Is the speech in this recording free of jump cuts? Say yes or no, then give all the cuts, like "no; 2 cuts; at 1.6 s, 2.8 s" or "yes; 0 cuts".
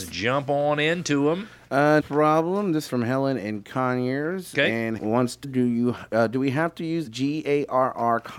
no; 5 cuts; at 2.0 s, 2.9 s, 5.0 s, 5.4 s, 7.1 s